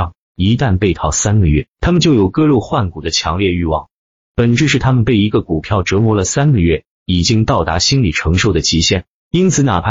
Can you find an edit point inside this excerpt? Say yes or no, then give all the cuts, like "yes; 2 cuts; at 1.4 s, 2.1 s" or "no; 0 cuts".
no; 0 cuts